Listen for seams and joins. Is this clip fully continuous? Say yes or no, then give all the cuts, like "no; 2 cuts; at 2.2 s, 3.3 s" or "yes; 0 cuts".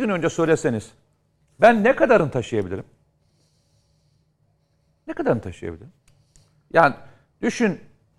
yes; 0 cuts